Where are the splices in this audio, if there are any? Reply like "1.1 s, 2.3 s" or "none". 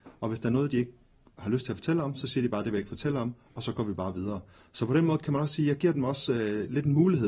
none